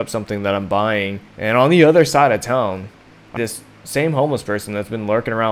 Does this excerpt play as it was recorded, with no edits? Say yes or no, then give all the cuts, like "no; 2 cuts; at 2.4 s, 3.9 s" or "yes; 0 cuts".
no; 2 cuts; at 1.3 s, 3.4 s